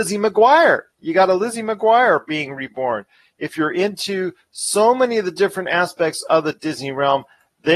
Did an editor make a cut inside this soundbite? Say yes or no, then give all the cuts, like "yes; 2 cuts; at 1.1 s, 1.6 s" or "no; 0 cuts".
no; 0 cuts